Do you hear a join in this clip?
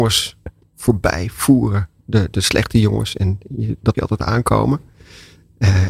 yes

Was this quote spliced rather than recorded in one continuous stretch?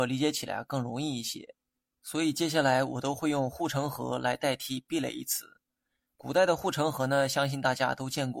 no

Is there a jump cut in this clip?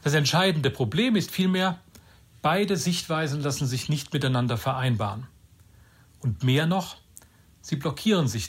no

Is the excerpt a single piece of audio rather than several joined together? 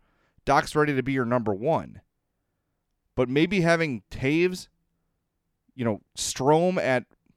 yes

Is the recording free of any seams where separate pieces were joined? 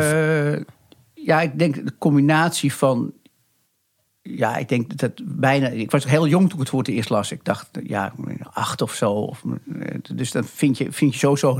yes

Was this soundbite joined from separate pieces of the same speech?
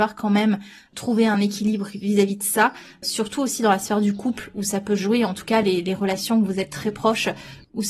no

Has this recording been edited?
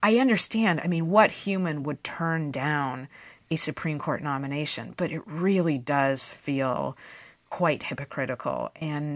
no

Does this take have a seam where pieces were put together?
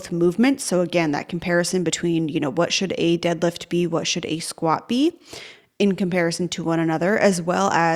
no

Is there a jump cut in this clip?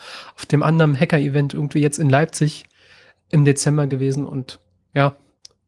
no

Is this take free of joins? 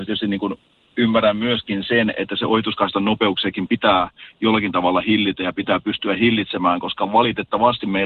yes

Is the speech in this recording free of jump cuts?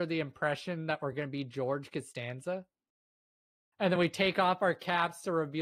yes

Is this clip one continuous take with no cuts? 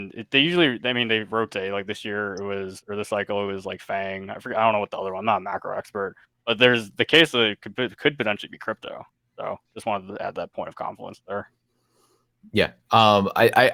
yes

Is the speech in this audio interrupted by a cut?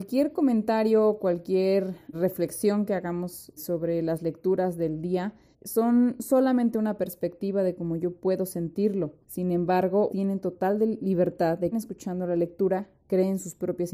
yes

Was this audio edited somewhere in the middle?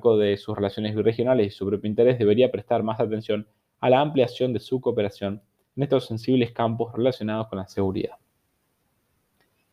no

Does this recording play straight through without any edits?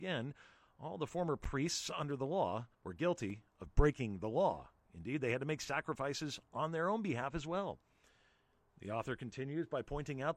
no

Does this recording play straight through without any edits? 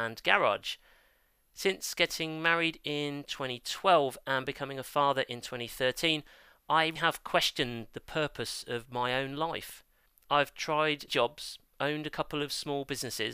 no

